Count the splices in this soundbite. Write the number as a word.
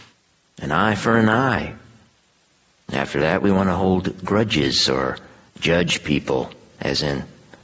zero